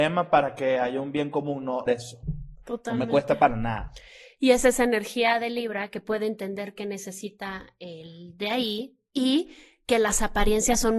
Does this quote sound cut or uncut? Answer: cut